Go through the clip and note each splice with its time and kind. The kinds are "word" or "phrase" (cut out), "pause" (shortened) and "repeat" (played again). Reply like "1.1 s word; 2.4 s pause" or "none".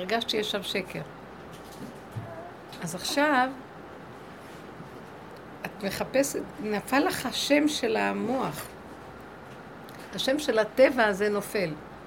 none